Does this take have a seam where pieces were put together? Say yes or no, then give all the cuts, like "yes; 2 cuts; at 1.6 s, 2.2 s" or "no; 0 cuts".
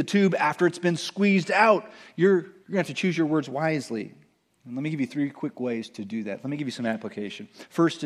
yes; 1 cut; at 2.6 s